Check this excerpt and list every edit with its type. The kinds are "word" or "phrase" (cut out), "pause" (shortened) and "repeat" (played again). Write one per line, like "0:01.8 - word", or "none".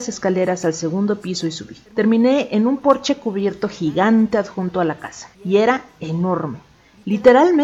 0:01.9 - pause
0:05.3 - pause